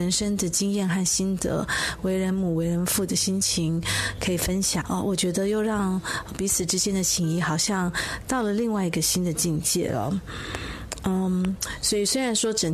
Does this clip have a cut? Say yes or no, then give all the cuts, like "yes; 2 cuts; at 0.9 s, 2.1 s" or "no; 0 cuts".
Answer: yes; 1 cut; at 4.8 s